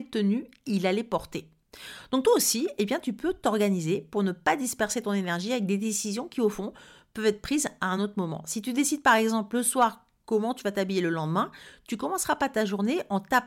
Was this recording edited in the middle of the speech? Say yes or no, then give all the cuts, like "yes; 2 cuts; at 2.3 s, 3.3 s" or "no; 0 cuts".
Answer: no; 0 cuts